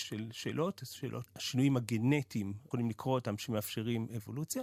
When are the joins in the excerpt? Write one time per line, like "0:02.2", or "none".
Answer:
0:01.3
0:02.7